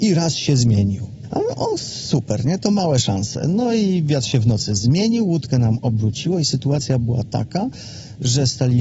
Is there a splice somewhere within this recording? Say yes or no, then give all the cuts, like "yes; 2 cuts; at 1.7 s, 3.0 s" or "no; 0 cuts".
no; 0 cuts